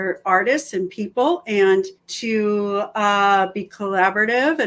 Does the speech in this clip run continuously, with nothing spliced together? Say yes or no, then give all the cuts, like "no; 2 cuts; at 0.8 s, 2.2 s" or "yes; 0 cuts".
no; 1 cut; at 2.0 s